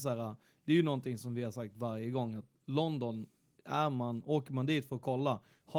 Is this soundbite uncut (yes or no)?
yes